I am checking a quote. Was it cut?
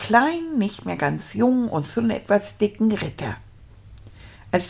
no; 0 cuts

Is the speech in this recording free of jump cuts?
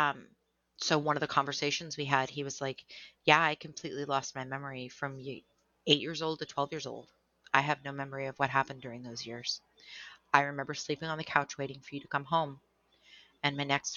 yes; 0 cuts

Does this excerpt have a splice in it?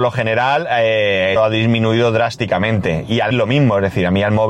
yes; 2 cuts; at 1.4 s, 3.3 s

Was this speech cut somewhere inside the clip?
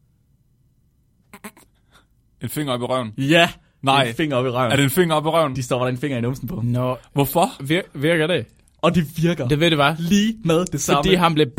no; 0 cuts

